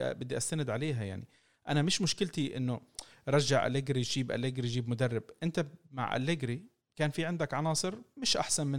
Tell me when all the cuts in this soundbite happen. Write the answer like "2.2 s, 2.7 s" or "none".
none